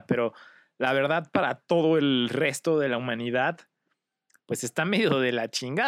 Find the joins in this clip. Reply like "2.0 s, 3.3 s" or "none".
none